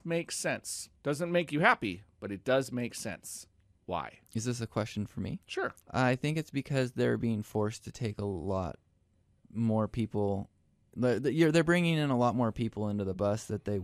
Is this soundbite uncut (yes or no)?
no